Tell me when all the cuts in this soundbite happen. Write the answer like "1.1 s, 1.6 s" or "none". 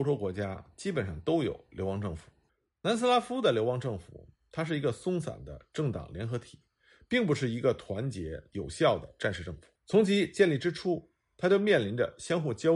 2.5 s, 8.5 s, 9.7 s